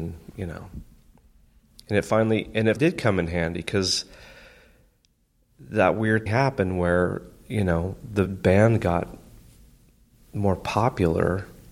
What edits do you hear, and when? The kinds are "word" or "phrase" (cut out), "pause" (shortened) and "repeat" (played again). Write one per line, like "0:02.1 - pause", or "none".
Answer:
0:02.8 - word
0:06.3 - word
0:08.3 - word